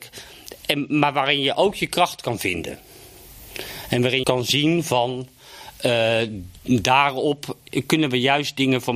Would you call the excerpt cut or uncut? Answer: cut